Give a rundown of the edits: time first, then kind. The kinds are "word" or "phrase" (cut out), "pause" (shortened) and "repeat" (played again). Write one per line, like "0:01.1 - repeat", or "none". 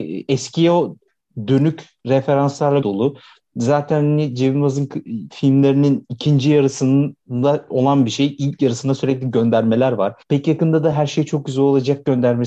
0:02.8 - word
0:07.2 - pause
0:10.2 - pause